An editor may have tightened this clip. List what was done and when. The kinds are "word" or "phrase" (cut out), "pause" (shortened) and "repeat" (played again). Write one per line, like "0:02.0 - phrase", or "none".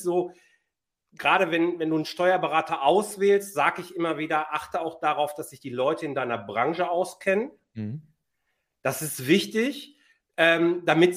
none